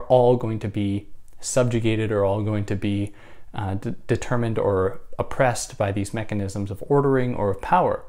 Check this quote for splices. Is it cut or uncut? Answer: uncut